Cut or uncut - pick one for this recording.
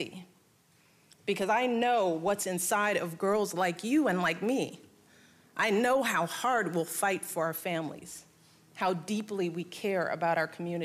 uncut